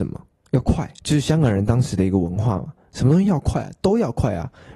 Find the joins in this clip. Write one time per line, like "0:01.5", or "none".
0:01.0